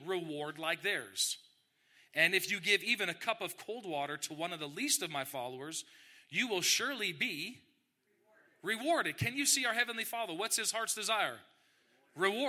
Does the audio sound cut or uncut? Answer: uncut